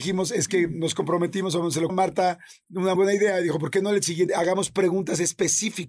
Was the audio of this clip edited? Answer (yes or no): yes